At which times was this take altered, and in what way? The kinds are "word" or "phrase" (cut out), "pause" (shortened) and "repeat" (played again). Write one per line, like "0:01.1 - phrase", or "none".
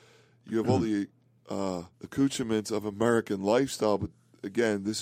0:01.9 - pause